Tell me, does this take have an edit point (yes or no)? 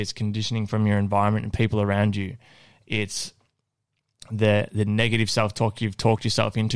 no